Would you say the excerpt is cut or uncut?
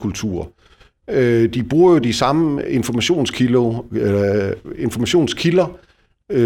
uncut